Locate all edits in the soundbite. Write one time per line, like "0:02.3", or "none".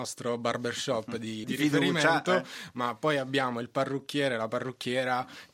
0:01.4